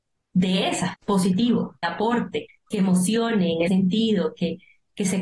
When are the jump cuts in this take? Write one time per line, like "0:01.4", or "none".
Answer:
0:00.9
0:01.8
0:02.5
0:03.7